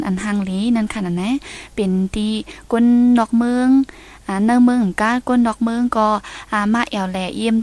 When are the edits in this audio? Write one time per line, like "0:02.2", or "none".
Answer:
none